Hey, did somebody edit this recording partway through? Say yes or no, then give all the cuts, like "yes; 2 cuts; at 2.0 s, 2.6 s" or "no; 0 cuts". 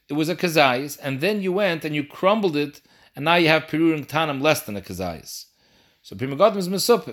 no; 0 cuts